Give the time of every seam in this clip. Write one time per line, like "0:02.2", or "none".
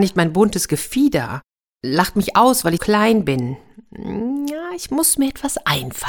0:02.8